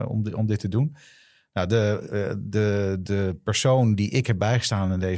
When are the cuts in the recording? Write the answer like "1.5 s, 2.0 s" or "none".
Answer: none